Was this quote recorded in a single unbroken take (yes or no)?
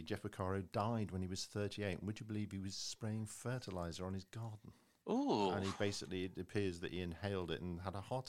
yes